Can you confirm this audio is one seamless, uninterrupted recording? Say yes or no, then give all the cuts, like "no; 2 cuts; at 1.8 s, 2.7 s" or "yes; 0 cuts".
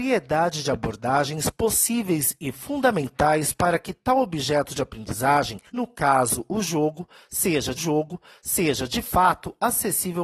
no; 2 cuts; at 5.7 s, 7.8 s